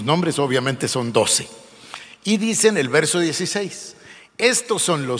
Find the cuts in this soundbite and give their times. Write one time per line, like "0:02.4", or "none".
none